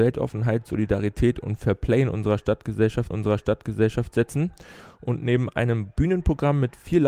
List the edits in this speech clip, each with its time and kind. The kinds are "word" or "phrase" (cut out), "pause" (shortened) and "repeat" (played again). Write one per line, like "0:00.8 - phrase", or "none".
0:03.1 - repeat